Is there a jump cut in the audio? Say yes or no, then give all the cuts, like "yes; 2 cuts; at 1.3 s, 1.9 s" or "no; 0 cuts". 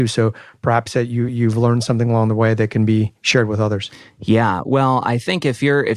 no; 0 cuts